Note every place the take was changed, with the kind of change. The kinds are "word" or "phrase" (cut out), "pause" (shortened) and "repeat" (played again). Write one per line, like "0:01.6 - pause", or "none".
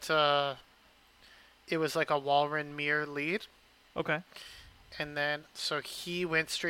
0:05.4 - word